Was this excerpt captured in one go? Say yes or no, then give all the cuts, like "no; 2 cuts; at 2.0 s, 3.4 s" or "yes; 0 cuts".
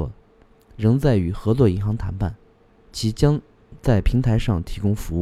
yes; 0 cuts